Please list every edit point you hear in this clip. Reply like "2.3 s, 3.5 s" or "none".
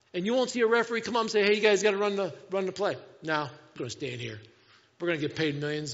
3.8 s